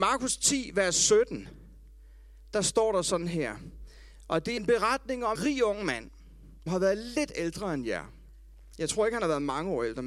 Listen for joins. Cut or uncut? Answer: cut